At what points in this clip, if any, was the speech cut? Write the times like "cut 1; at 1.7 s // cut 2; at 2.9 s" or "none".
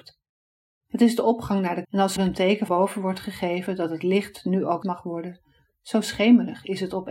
cut 1; at 1.8 s // cut 2; at 2.2 s // cut 3; at 2.7 s // cut 4; at 4.8 s